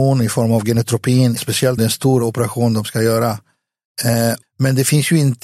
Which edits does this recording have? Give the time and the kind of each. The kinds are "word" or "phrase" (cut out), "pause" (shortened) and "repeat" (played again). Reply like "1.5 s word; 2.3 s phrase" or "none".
1.4 s word; 1.8 s word; 4.4 s word